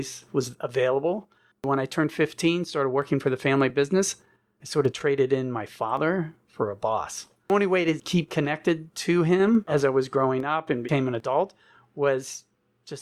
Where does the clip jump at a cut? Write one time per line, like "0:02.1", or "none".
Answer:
none